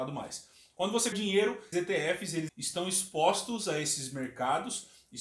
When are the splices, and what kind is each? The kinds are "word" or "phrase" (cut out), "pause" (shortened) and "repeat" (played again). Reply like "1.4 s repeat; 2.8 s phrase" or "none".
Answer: 1.1 s word; 1.7 s phrase; 2.5 s word